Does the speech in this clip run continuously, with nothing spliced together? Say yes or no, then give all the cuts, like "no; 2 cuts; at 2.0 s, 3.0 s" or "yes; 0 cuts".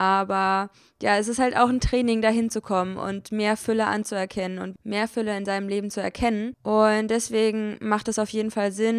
yes; 0 cuts